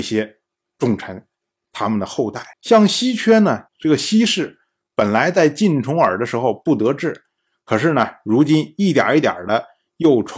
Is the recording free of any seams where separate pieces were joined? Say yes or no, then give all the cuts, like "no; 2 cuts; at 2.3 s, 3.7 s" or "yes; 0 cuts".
no; 2 cuts; at 2.5 s, 3.7 s